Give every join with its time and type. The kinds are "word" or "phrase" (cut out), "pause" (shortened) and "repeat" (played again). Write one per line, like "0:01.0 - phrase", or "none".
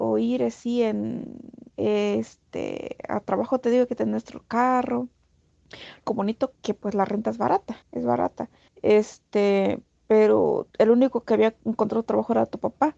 0:01.7 - pause
0:06.1 - word
0:06.6 - word
0:07.8 - pause
0:08.7 - pause
0:10.7 - pause